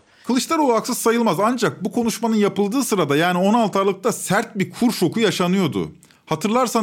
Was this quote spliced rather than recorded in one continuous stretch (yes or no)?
no